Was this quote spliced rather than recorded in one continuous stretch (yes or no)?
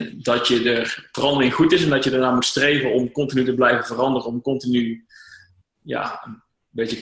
yes